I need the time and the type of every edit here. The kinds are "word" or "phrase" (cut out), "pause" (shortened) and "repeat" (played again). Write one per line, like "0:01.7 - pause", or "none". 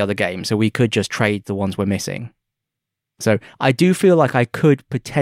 none